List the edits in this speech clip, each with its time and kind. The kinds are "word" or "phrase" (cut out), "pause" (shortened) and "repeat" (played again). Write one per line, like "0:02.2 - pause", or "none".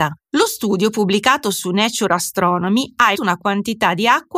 0:03.1 - word